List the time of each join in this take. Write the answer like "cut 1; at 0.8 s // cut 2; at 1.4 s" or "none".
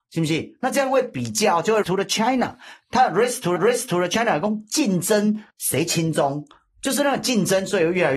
cut 1; at 1.8 s // cut 2; at 3.6 s // cut 3; at 5.5 s